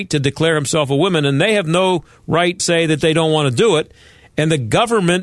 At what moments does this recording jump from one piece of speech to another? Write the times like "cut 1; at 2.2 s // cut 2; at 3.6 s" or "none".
cut 1; at 2.6 s